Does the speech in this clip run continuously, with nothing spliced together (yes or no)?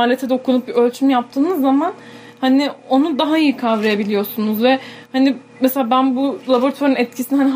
yes